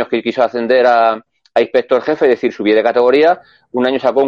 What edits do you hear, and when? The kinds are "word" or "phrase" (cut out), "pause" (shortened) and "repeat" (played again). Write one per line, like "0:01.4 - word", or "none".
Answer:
none